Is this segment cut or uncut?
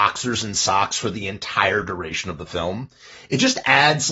uncut